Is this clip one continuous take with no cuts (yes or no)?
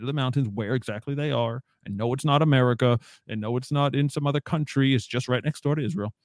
yes